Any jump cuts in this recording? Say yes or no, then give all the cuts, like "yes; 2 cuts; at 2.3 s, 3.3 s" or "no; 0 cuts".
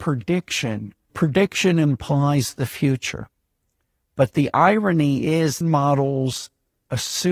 yes; 2 cuts; at 1.1 s, 5.6 s